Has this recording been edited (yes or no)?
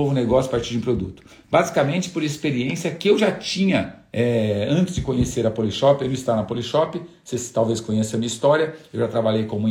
no